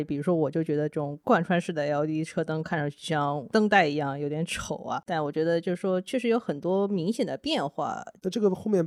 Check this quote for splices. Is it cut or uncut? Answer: uncut